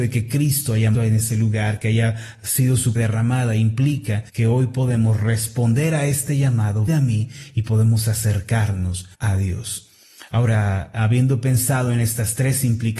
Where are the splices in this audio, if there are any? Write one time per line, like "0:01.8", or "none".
0:00.9
0:03.0
0:04.3
0:06.9
0:09.1